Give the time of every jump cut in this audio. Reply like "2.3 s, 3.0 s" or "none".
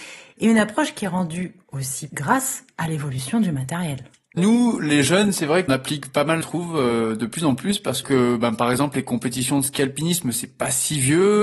2.1 s, 4.4 s, 5.7 s, 6.4 s, 8.0 s